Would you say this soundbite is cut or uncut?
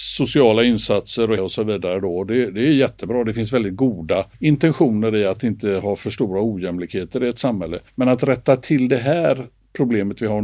cut